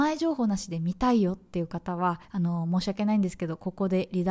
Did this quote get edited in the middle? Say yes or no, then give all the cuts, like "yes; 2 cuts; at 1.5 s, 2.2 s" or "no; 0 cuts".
yes; 1 cut; at 2.2 s